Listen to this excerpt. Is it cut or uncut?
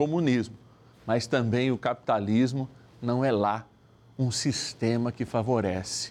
uncut